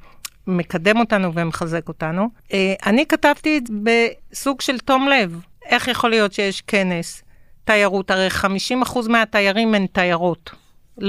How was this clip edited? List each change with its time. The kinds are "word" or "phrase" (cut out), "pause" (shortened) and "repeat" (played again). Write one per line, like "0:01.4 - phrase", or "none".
0:03.7 - word
0:05.5 - pause